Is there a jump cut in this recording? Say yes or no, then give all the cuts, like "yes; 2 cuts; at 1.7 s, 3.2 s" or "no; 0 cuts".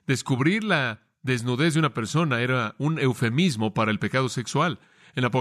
no; 0 cuts